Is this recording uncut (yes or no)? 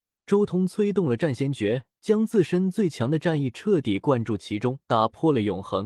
no